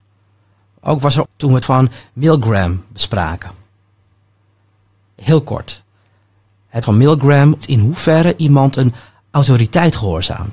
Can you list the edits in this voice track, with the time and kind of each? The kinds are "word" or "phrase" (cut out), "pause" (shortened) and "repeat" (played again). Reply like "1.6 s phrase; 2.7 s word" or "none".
1.3 s word; 1.6 s word; 6.8 s word; 7.6 s word